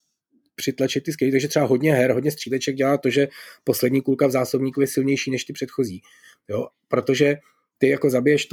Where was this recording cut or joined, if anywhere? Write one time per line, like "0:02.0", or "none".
none